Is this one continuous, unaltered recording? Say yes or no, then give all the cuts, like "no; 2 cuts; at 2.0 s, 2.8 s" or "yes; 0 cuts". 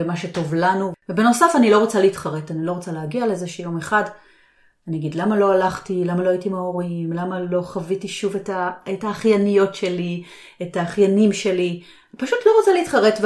yes; 0 cuts